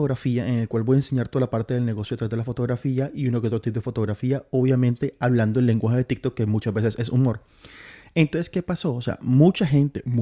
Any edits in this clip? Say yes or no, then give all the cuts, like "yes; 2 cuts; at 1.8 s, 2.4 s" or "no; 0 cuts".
no; 0 cuts